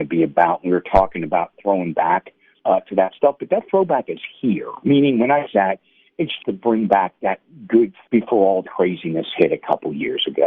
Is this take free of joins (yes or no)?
no